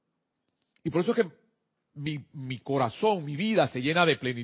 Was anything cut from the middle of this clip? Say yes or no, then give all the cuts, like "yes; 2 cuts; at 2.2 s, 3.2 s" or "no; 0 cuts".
no; 0 cuts